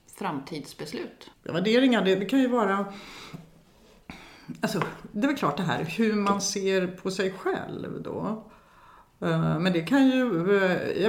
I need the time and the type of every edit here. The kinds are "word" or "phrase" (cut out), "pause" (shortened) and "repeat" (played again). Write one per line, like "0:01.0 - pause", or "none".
0:01.3 - pause